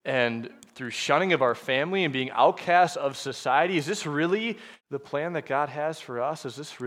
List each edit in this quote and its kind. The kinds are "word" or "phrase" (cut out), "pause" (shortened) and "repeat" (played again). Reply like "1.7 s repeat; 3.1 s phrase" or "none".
4.8 s pause